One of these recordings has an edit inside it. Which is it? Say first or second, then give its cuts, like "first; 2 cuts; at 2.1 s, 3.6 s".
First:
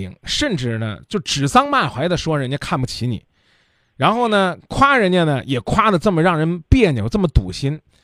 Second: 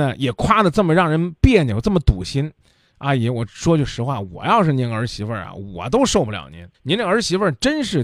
second; 1 cut; at 6.7 s